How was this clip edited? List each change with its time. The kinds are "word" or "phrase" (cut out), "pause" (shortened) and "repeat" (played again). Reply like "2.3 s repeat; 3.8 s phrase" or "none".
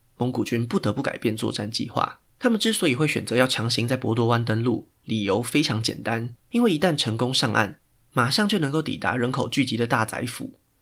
2.3 s pause; 6.4 s pause